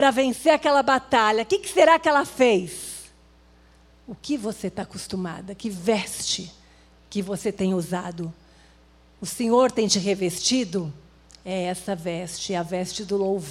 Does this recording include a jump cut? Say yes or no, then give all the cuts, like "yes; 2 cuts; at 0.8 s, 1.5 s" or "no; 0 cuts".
no; 0 cuts